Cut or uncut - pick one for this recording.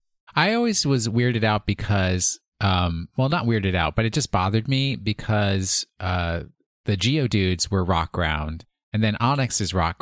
cut